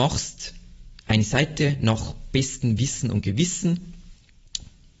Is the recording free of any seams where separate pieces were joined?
yes; 0 cuts

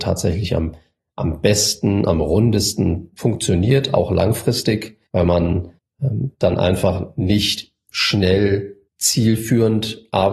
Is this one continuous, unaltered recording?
no; 3 cuts; at 5.1 s, 5.8 s, 8.9 s

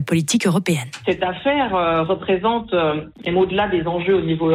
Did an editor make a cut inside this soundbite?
no; 0 cuts

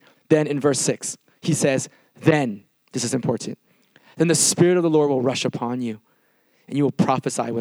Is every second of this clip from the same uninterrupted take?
yes; 0 cuts

